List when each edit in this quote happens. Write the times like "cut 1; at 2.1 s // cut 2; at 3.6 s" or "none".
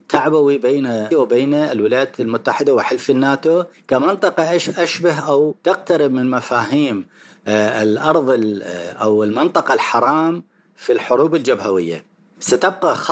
cut 1; at 1.1 s